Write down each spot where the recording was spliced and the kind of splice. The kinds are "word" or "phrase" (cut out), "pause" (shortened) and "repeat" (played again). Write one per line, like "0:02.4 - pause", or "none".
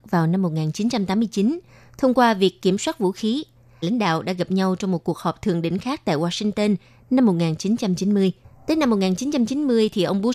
0:01.7 - pause
0:03.8 - phrase
0:08.4 - pause